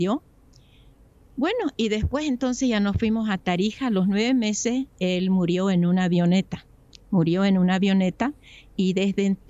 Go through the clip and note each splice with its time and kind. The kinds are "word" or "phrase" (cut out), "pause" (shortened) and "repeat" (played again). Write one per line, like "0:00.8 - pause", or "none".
none